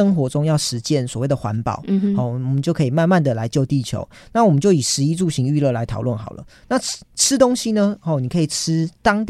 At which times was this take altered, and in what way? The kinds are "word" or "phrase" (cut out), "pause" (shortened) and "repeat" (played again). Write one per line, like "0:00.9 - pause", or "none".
none